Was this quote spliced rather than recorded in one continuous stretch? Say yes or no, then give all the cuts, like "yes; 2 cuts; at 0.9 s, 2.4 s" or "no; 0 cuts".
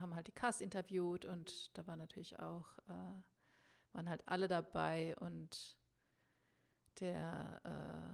no; 0 cuts